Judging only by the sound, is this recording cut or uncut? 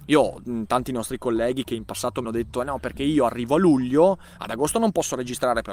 cut